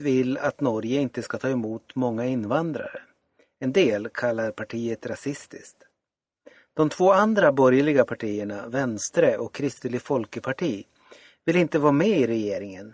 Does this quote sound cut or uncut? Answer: uncut